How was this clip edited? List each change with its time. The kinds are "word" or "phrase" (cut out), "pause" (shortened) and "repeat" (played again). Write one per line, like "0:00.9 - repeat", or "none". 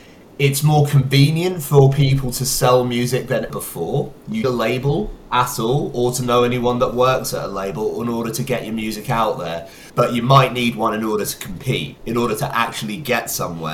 0:03.5 - word
0:04.4 - phrase
0:09.9 - pause
0:12.0 - pause